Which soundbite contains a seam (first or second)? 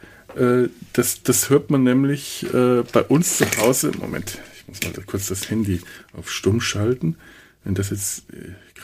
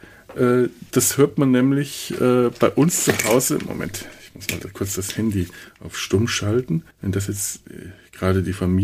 second